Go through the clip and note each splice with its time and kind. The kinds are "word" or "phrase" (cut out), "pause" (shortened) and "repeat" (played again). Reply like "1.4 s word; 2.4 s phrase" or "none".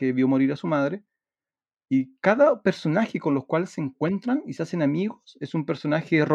none